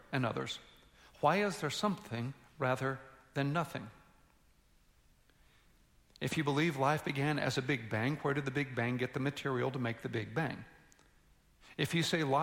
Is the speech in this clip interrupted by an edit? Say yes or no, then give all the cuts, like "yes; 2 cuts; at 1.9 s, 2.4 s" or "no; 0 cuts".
no; 0 cuts